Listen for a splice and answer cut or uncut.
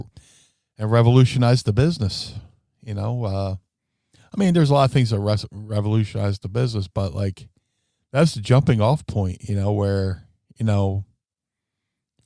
uncut